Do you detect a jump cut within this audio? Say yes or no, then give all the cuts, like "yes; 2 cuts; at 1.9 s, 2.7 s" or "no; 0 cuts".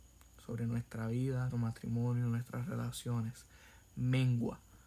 yes; 1 cut; at 1.5 s